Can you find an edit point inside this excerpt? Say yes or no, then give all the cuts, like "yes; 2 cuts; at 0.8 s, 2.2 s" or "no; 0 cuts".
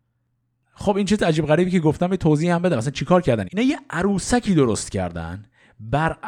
yes; 1 cut; at 3.4 s